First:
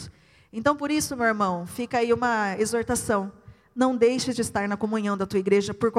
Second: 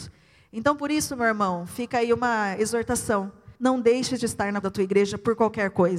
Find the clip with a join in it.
second; 2 cuts; at 3.6 s, 4.6 s

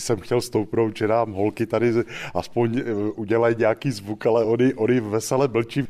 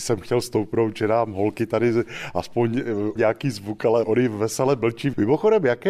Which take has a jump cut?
second; 2 cuts; at 3.2 s, 4.0 s

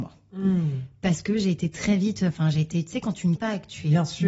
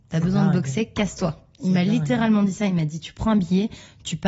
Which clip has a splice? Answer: first; 1 cut; at 3.4 s

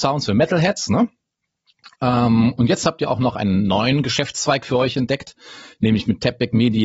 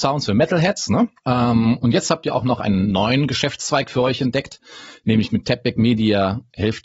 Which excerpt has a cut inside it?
second; 1 cut; at 1.2 s

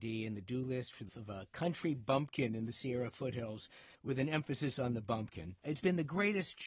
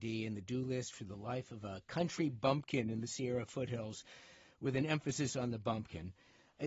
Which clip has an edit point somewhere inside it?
first; 3 cuts; at 1.1 s, 3.9 s, 5.6 s

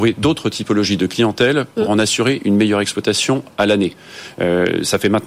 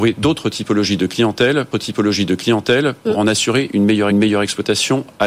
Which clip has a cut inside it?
second; 2 cuts; at 1.7 s, 4.1 s

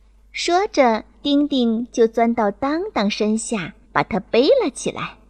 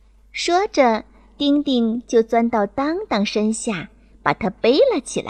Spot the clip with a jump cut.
first; 2 cuts; at 1.1 s, 3.8 s

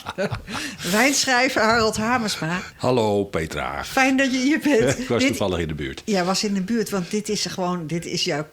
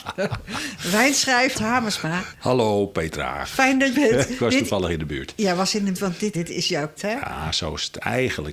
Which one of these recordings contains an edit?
second; 5 cuts; at 1.5 s, 3.9 s, 5.9 s, 6.3 s, 7.0 s

